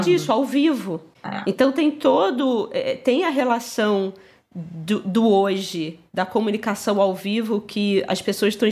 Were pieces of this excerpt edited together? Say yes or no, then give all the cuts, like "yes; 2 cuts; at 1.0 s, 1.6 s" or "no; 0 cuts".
no; 0 cuts